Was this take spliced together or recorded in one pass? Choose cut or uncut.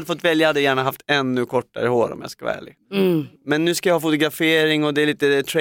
uncut